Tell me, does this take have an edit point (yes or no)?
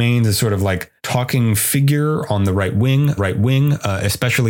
yes